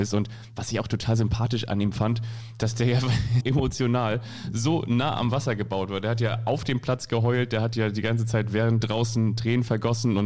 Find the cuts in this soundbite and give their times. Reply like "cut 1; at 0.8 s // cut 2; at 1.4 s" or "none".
cut 1; at 3.4 s // cut 2; at 8.8 s